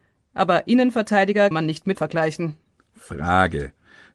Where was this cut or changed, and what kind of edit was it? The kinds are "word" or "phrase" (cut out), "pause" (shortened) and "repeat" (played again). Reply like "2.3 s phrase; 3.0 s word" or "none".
1.5 s word; 1.9 s word